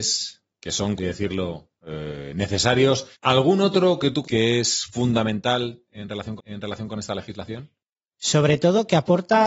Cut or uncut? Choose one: cut